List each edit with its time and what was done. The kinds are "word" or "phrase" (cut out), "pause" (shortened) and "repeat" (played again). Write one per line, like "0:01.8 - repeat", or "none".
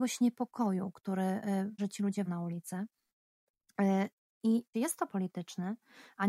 0:01.8 - word
0:02.3 - word
0:04.7 - word
0:05.1 - word